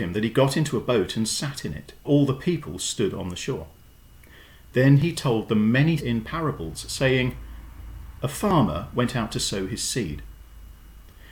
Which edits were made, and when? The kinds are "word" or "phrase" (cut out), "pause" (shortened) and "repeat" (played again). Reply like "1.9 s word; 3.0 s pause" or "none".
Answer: 2.0 s word; 6.0 s word